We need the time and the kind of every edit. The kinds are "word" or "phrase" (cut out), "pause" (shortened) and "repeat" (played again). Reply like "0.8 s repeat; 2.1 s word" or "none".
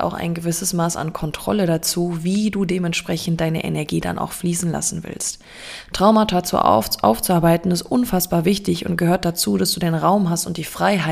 none